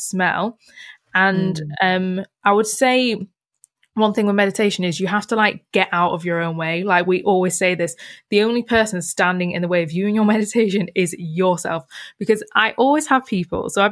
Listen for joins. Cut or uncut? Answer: uncut